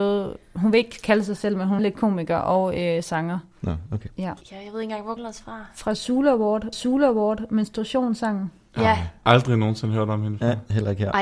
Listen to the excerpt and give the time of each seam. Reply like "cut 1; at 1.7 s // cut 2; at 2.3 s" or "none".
cut 1; at 1.8 s // cut 2; at 4.4 s // cut 3; at 5.2 s // cut 4; at 6.7 s